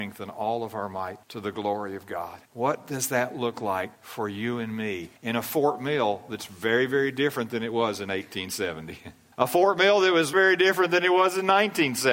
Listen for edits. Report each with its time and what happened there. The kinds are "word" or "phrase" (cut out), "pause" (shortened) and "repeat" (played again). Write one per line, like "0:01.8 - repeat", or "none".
0:01.2 - pause
0:02.5 - pause
0:03.9 - pause
0:05.2 - pause
0:09.3 - pause
0:10.3 - word